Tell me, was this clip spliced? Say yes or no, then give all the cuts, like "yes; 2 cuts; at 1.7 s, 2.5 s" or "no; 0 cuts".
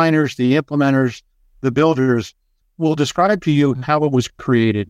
yes; 1 cut; at 2.6 s